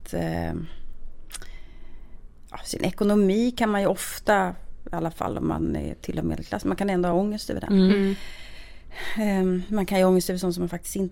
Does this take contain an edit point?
no; 0 cuts

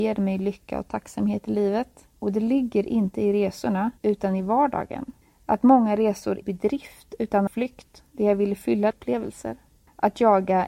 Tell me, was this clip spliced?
yes; 6 cuts; at 2.2 s, 4.0 s, 5.2 s, 6.4 s, 7.5 s, 8.9 s

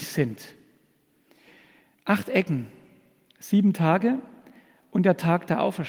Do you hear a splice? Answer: no; 0 cuts

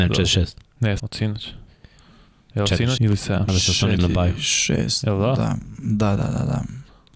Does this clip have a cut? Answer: yes; 5 cuts; at 1.0 s, 3.0 s, 3.5 s, 4.0 s, 6.2 s

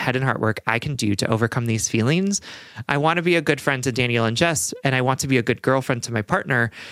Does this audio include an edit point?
no; 0 cuts

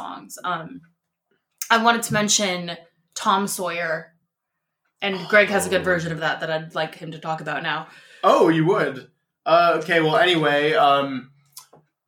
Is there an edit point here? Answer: no; 0 cuts

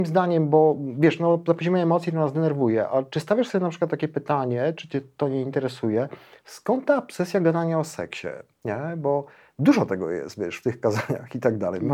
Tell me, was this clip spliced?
no; 0 cuts

